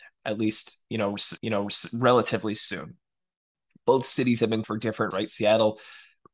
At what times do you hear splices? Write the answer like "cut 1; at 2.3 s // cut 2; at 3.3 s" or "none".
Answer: cut 1; at 1.4 s // cut 2; at 4.6 s // cut 3; at 5.1 s